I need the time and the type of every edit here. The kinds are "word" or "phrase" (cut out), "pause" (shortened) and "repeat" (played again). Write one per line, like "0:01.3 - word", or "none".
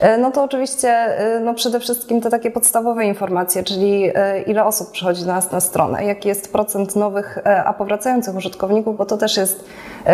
none